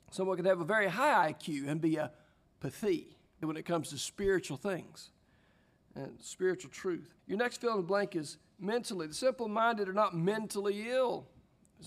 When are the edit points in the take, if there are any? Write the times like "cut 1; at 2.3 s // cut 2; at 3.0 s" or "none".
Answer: cut 1; at 3.4 s // cut 2; at 7.2 s